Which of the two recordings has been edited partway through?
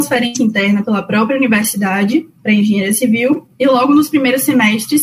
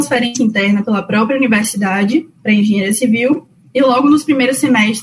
first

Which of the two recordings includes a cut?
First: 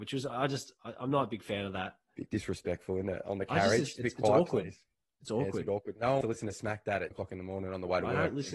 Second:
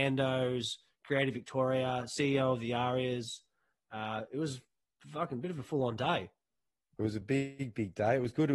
first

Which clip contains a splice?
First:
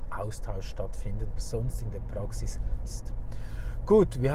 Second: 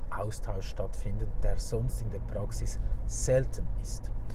first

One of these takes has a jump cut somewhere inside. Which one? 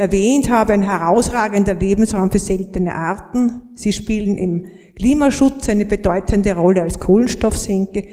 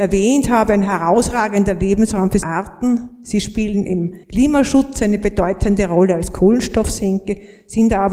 second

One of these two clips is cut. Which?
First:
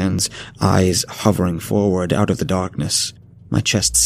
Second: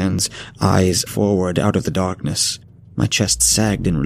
second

